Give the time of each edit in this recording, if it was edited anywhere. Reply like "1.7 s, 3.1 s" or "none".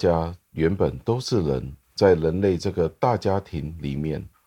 1.8 s

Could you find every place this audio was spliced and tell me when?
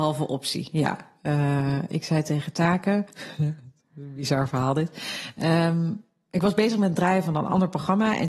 none

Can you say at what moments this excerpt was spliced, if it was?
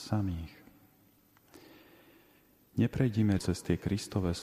3.4 s

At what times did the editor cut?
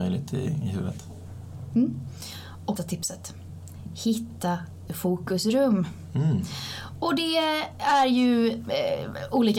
2.8 s, 4.9 s

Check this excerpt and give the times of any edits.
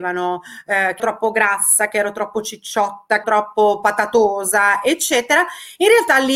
1.0 s, 3.2 s

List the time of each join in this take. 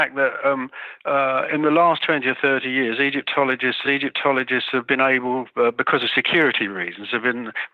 3.8 s

